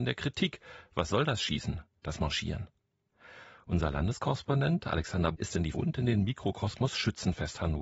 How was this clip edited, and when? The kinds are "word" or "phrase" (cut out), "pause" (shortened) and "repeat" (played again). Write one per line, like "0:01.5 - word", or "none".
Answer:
0:05.3 - word
0:05.7 - word